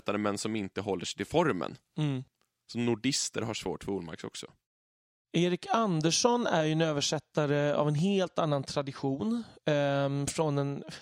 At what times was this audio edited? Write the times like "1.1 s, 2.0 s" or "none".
none